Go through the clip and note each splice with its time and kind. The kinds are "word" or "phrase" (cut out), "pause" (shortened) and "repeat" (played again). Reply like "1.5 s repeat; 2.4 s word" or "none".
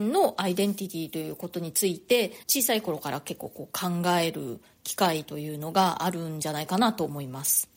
2.4 s pause